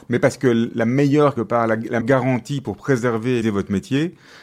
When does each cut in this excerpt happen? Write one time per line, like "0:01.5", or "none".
0:01.4
0:02.0
0:03.4

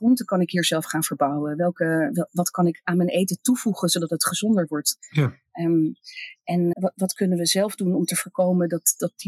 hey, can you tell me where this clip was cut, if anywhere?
0:06.7

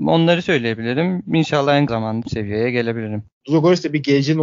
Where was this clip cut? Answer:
0:01.9
0:02.2

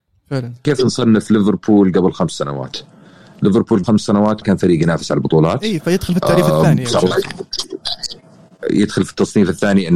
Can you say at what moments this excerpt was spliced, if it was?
0:03.8
0:04.4

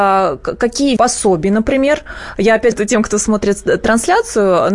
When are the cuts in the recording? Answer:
0:01.0
0:02.7

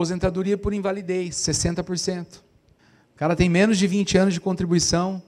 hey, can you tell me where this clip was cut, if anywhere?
0:02.8

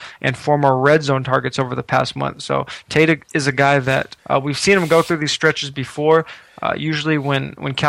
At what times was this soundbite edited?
0:04.2

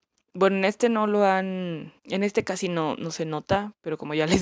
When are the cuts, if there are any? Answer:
0:02.0

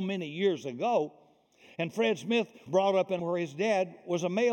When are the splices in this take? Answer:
0:02.7
0:03.2

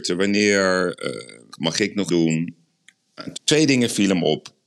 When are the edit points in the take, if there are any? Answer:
0:01.5
0:02.1
0:03.3

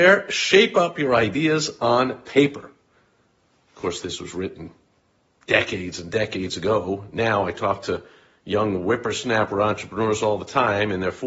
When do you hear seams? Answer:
none

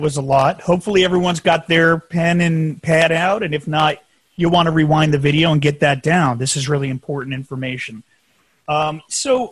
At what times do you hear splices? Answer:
none

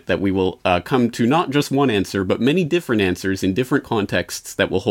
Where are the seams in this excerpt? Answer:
none

